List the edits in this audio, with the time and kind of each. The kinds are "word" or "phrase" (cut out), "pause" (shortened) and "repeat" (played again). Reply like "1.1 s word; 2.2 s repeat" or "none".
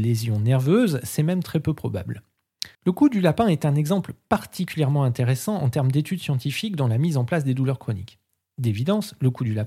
2.7 s pause